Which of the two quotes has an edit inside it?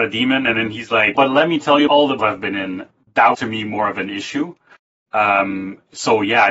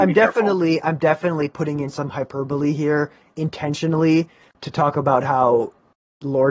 first; 4 cuts; at 1.1 s, 1.9 s, 2.2 s, 3.3 s

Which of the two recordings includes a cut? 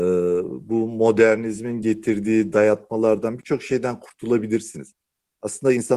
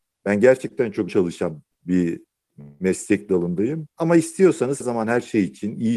second; 4 cuts; at 1.1 s, 1.7 s, 3.9 s, 4.8 s

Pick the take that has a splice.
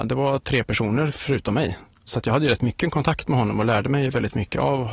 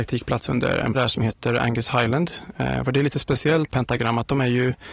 second; 2 cuts; at 0.9 s, 3.7 s

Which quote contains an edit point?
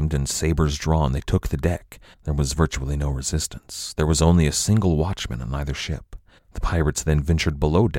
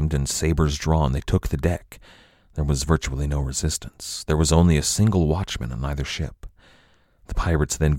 first; 2 cuts; at 2.1 s, 6.4 s

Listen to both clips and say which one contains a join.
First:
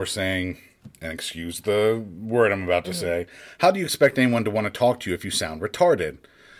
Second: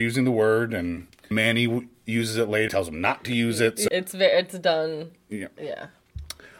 second; 3 cuts; at 1.3 s, 2.7 s, 3.9 s

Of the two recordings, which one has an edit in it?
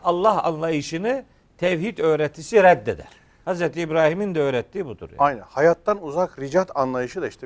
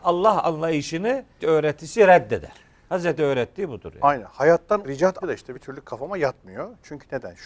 second; 5 cuts; at 1.4 s, 3.2 s, 4.8 s, 5.2 s, 5.5 s

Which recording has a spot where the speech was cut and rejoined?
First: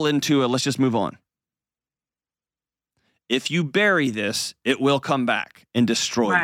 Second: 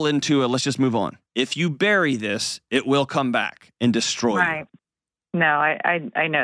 second; 1 cut; at 1.3 s

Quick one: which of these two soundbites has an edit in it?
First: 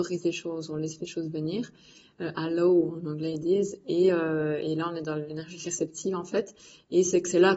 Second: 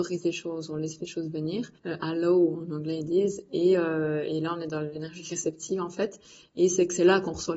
second; 1 cut; at 1.8 s

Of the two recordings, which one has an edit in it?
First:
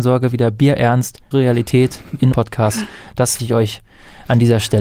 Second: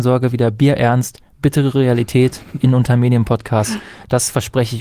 first; 3 cuts; at 1.3 s, 2.3 s, 3.4 s

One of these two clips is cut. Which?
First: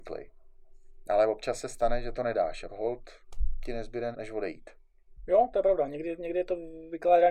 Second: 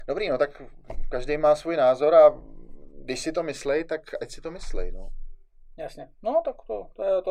first; 3 cuts; at 2.1 s, 2.7 s, 4.1 s

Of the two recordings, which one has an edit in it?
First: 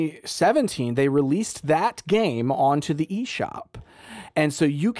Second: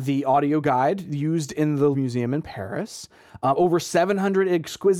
second; 1 cut; at 1.9 s

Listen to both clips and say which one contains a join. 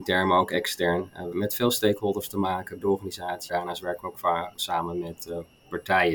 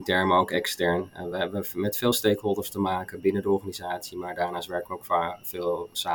first; 4 cuts; at 1.3 s, 2.8 s, 3.5 s, 4.5 s

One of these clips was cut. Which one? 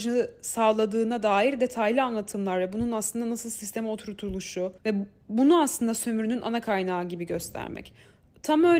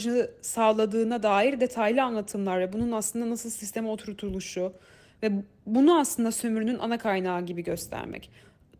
first; 1 cut; at 4.8 s

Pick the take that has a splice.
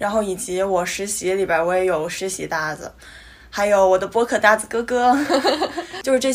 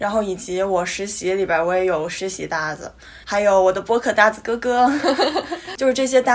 second; 1 cut; at 3.2 s

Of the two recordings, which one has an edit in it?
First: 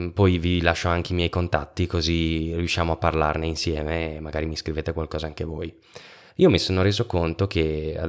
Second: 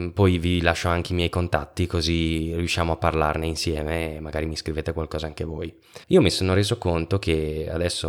second; 1 cut; at 6.0 s

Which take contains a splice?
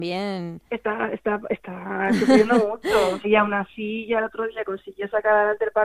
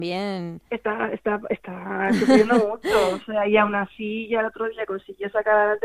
first; 1 cut; at 3.2 s

